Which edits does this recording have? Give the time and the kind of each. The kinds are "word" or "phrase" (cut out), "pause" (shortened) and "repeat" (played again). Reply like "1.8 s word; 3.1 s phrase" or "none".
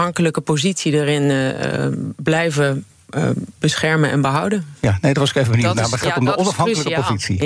none